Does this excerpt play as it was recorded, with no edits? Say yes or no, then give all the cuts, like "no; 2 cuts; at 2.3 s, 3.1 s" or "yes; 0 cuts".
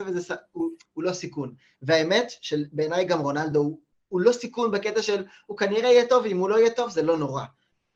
yes; 0 cuts